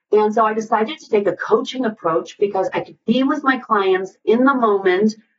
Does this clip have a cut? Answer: no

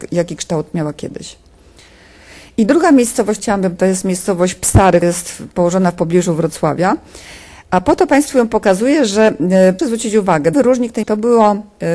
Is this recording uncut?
no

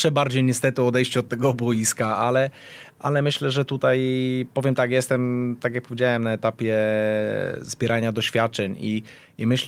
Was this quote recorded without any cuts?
yes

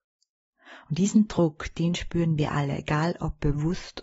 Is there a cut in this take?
no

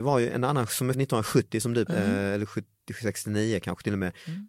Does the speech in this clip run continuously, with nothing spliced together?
no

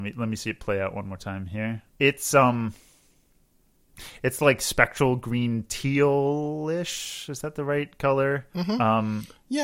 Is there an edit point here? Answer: yes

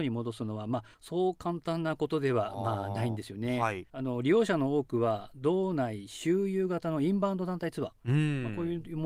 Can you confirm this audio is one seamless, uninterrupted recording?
no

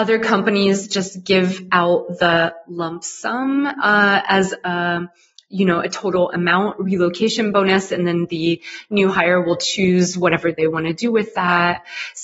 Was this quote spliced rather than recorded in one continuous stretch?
no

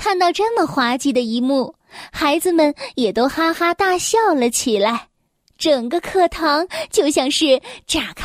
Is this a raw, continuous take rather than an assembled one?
yes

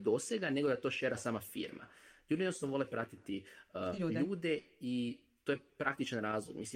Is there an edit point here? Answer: no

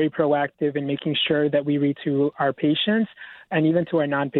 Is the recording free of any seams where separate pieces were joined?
no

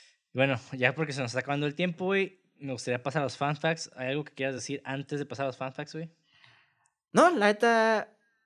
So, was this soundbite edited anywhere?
no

